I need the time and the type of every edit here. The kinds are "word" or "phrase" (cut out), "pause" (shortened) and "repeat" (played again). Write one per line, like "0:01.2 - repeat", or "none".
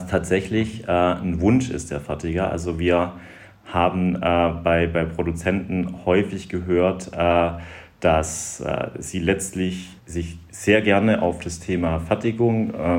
0:10.0 - pause

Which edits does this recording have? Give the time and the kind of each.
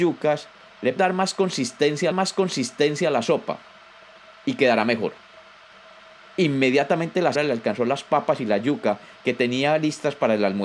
0:01.0 - word
0:02.1 - repeat
0:07.3 - word

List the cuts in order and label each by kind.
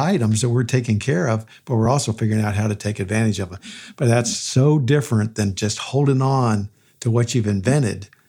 none

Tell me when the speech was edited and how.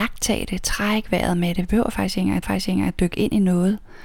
0:02.4 - repeat

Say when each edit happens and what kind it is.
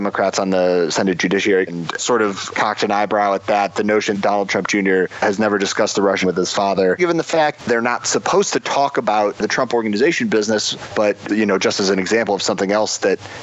0:01.7 - word
0:02.0 - word
0:02.5 - word
0:04.1 - word
0:06.2 - word
0:07.0 - word
0:07.6 - word
0:11.3 - word

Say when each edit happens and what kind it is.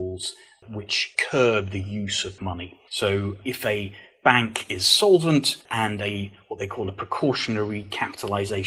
0:02.4 - word
0:05.6 - pause

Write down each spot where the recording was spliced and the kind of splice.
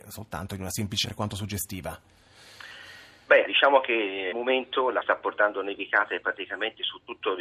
0:01.0 - word
0:03.5 - word
0:04.3 - word
0:05.0 - word

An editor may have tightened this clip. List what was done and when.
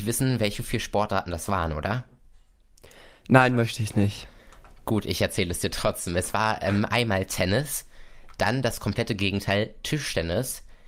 none

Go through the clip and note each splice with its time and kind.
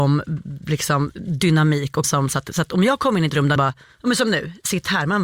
0:02.0 - word
0:03.6 - word

